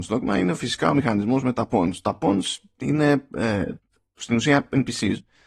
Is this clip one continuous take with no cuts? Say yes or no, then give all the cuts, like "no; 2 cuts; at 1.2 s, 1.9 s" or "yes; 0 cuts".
yes; 0 cuts